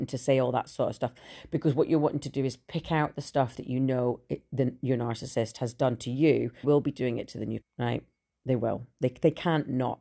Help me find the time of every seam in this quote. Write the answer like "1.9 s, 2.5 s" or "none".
6.6 s, 7.6 s